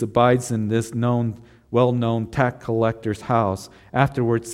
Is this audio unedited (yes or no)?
yes